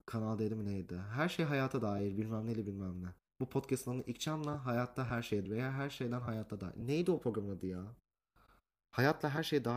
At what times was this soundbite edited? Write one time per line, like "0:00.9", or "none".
0:05.5